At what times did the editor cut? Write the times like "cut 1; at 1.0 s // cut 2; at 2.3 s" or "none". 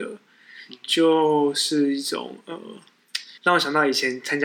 cut 1; at 3.4 s